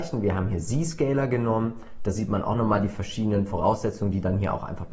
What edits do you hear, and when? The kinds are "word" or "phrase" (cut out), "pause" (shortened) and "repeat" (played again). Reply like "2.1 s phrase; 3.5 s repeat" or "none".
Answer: none